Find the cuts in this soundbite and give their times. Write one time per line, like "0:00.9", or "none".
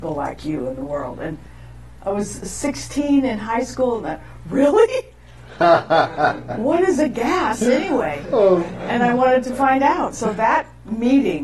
none

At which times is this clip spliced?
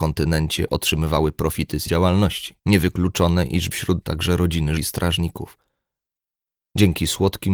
0:01.9
0:02.6
0:03.7
0:04.0
0:04.8

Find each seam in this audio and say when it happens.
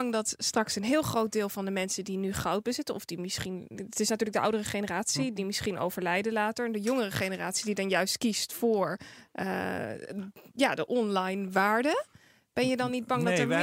none

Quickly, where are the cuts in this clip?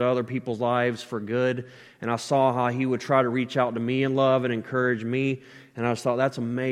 none

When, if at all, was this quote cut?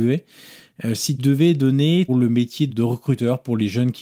0:01.2
0:02.1
0:02.7

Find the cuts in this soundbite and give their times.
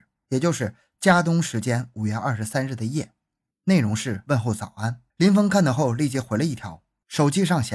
0:05.1

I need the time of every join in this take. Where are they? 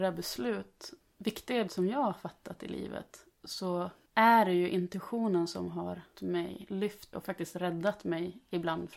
0:01.7
0:03.3
0:06.1
0:07.1

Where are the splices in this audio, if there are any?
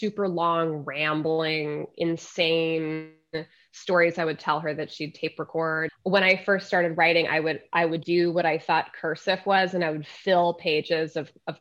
0:05.9
0:08.0

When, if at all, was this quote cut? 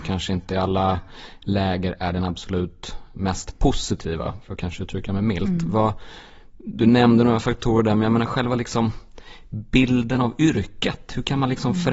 none

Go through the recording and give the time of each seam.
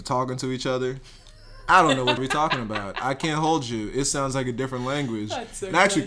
0:02.2

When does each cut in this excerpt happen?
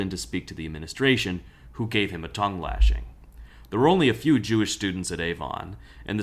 none

